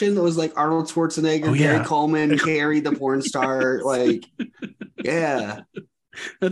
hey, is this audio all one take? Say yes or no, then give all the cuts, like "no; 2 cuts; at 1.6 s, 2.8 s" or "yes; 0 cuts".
no; 1 cut; at 2.4 s